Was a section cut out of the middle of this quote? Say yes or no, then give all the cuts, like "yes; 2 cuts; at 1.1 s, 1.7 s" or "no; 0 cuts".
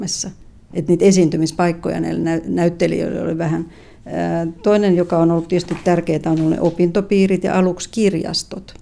no; 0 cuts